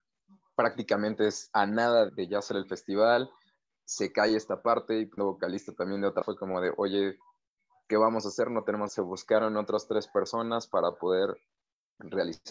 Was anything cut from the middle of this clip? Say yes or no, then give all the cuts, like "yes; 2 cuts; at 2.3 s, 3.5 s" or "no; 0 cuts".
yes; 4 cuts; at 2.1 s, 5.2 s, 6.2 s, 8.9 s